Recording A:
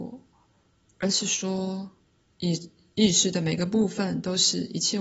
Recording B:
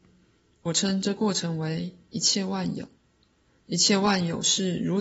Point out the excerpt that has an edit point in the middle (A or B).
B